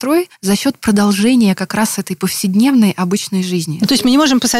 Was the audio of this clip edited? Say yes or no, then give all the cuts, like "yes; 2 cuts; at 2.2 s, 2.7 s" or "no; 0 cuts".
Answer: no; 0 cuts